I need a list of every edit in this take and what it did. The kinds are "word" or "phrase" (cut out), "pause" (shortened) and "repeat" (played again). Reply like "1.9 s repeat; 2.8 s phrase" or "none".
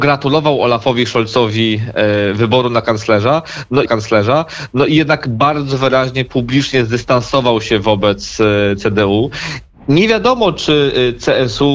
3.9 s repeat